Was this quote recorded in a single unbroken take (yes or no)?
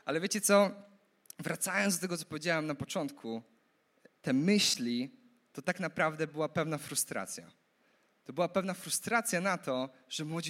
yes